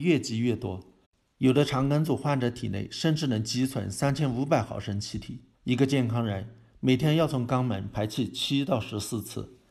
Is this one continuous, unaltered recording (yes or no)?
no